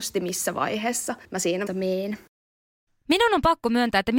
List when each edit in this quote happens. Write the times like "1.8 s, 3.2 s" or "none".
1.2 s, 1.7 s